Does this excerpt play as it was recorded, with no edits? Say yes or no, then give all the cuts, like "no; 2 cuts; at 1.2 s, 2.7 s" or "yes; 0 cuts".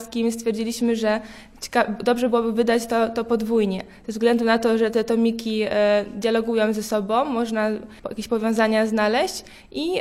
no; 1 cut; at 8.0 s